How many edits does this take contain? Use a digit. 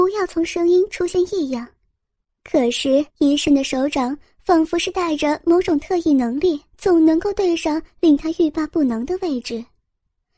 2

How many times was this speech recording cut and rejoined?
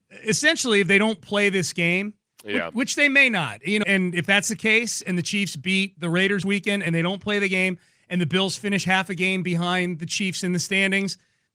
2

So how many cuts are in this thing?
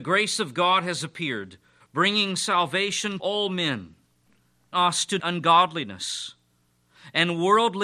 4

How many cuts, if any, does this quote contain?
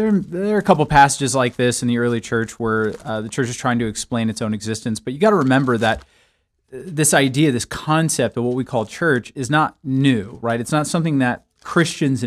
0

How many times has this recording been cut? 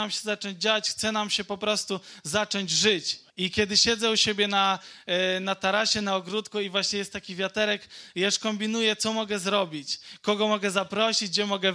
1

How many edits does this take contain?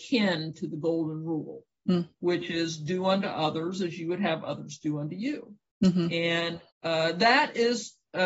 1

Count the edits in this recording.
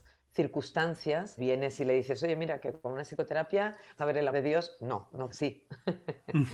4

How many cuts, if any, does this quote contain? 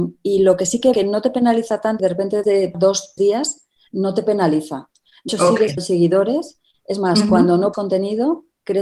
8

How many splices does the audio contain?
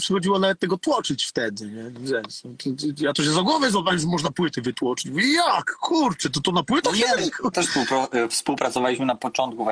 2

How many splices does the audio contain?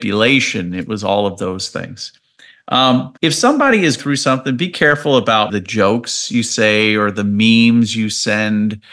3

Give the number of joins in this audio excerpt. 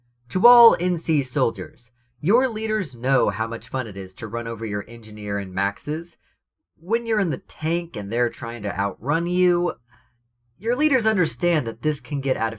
0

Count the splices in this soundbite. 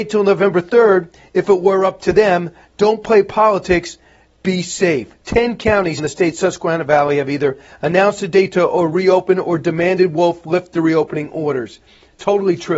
2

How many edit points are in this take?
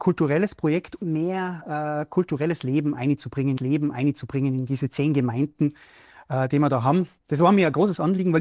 3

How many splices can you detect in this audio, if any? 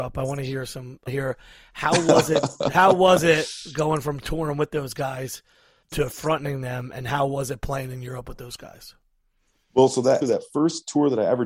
3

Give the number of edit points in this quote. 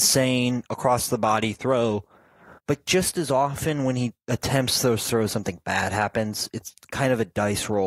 1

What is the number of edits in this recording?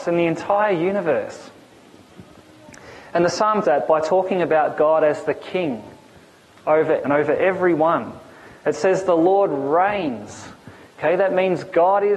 2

